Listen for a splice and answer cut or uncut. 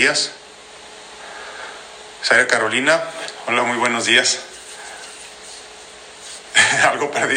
uncut